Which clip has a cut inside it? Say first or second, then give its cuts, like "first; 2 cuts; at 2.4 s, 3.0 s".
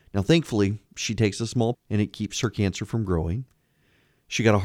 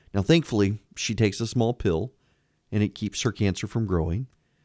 first; 1 cut; at 1.7 s